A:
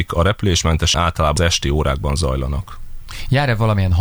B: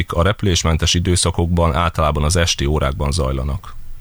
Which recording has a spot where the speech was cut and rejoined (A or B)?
A